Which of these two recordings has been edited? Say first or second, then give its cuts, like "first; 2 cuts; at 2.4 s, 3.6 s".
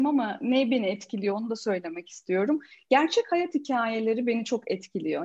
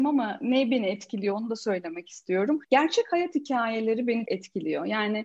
second; 2 cuts; at 2.6 s, 4.3 s